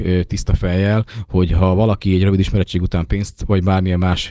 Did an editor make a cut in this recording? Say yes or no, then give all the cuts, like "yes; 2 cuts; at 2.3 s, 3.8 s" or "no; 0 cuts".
no; 0 cuts